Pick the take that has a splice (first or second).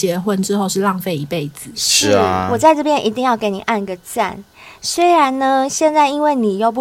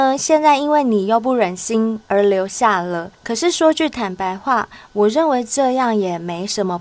second